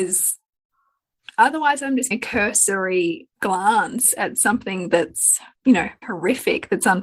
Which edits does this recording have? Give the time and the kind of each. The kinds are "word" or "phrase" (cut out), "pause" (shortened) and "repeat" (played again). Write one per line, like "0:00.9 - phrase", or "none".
0:02.1 - word
0:03.3 - pause
0:05.6 - pause
0:06.0 - word